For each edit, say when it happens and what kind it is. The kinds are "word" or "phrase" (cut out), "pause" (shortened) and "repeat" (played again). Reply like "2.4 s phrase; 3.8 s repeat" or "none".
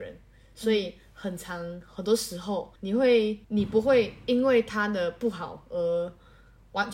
2.8 s pause; 3.4 s pause

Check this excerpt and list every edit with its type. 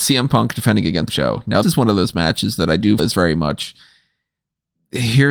1.1 s word; 1.6 s word; 3.0 s word

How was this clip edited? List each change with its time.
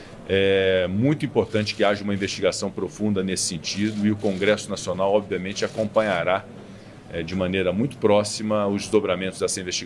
none

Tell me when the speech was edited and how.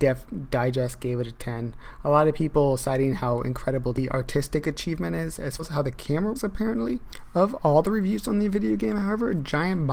5.6 s word; 6.3 s word

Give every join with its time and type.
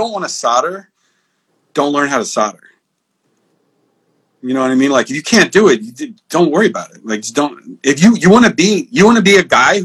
none

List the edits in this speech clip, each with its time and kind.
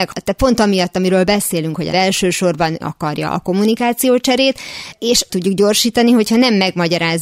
1.9 s word; 2.8 s word; 5.3 s word

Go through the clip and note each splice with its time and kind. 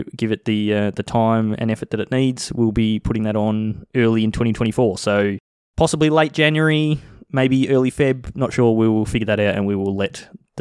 none

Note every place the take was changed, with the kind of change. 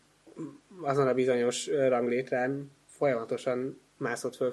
2.9 s pause

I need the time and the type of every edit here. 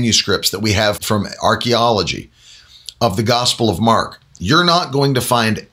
1.0 s word

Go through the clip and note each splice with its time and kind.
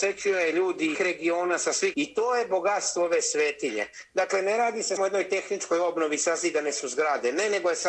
0.9 s word; 1.9 s word; 5.0 s word

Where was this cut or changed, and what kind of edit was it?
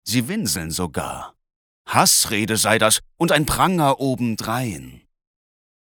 none

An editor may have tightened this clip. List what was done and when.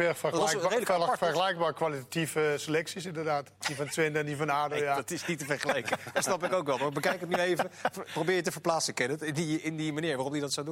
3.6 s pause

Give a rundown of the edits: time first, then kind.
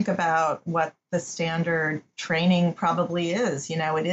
none

